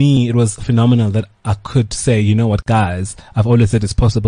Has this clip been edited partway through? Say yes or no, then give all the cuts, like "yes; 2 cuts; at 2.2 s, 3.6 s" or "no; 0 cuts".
yes; 1 cut; at 1.3 s